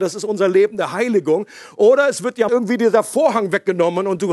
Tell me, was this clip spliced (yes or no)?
yes